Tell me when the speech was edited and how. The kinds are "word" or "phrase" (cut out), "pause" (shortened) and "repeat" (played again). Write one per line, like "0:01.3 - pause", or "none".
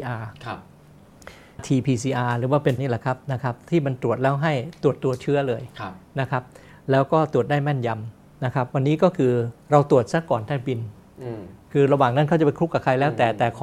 0:01.6 - phrase
0:02.8 - word
0:09.6 - pause